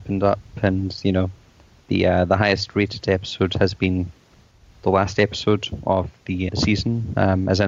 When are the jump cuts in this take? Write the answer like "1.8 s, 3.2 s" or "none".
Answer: 6.5 s